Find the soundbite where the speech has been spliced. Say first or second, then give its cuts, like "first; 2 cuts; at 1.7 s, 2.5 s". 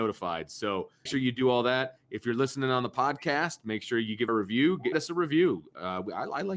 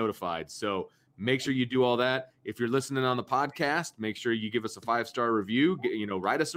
first; 3 cuts; at 1.1 s, 4.3 s, 4.9 s